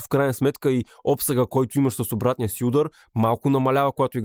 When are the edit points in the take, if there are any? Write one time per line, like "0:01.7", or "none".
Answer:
none

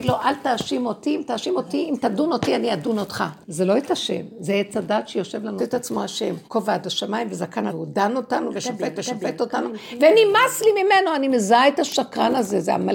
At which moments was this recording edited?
0:03.4
0:05.6
0:06.4
0:07.7
0:08.9

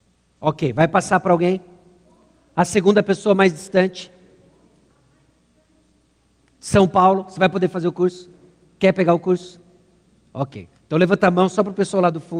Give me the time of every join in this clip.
none

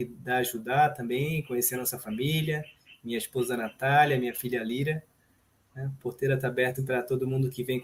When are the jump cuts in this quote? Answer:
0:06.8

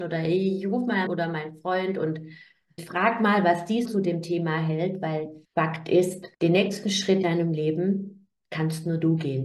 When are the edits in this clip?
0:01.1
0:02.8
0:03.8
0:05.4
0:06.3
0:07.2

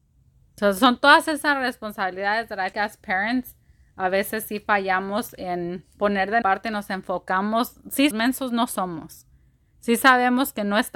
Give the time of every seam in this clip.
0:02.7
0:06.4
0:08.1

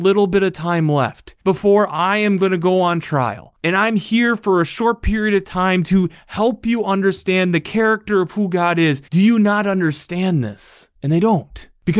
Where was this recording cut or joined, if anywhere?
0:01.4
0:09.1

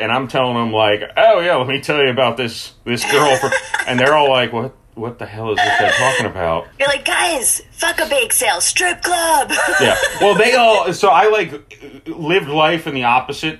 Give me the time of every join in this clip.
0:06.7

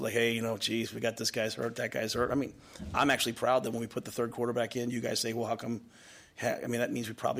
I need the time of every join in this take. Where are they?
none

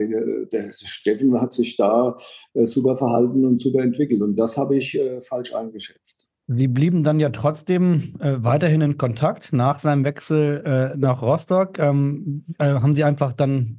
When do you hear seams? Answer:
0:06.4

